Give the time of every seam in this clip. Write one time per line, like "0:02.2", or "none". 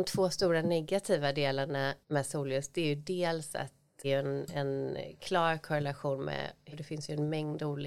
0:02.0
0:04.0
0:06.7